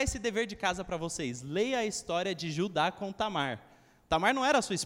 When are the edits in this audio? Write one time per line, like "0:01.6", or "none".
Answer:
none